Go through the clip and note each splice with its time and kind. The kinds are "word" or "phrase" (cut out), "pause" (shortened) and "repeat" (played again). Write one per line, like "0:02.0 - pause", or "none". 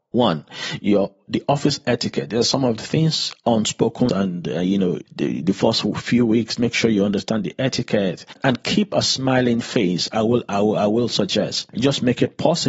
0:04.1 - word
0:05.1 - word
0:06.6 - word